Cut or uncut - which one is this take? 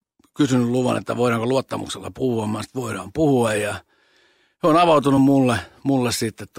uncut